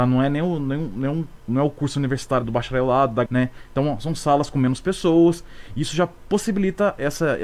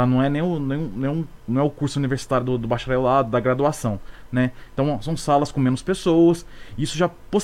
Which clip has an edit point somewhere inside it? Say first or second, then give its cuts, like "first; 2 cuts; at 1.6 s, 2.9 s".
first; 2 cuts; at 2.4 s, 3.3 s